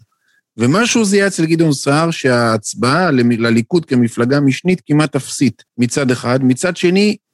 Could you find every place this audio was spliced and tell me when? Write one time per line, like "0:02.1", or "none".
0:05.7